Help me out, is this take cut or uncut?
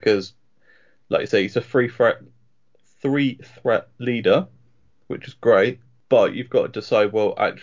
uncut